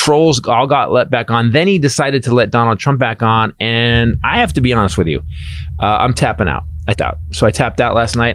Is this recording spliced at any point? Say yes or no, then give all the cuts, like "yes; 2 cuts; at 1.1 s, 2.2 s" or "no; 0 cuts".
yes; 1 cut; at 6.9 s